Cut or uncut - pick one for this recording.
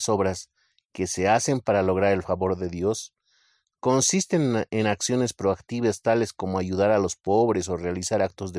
uncut